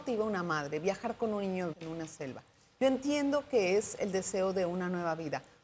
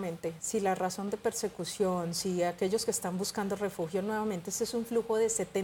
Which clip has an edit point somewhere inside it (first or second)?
first